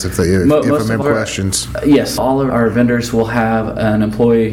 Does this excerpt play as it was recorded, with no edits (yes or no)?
no